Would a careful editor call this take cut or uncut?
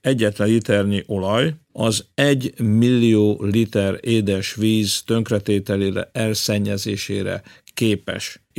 uncut